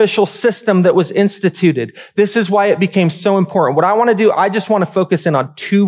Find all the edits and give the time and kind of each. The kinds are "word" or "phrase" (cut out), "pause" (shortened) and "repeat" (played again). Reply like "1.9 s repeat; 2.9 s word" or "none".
none